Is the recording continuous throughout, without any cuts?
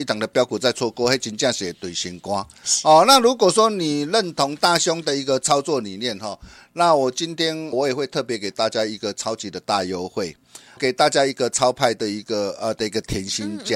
no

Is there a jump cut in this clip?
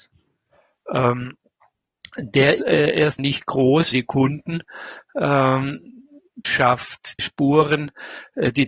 yes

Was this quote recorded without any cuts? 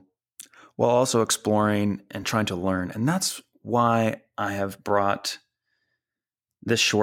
yes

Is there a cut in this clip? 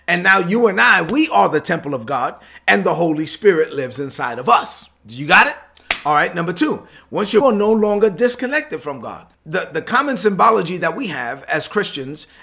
yes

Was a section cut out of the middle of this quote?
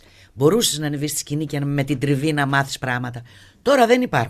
no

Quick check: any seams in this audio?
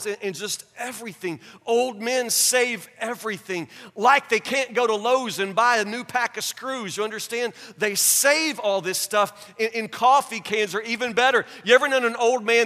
no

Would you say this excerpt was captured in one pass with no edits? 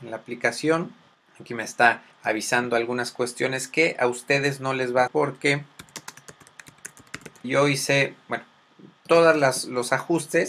no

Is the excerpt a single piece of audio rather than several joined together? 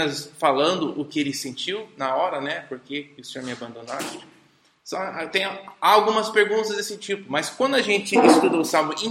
yes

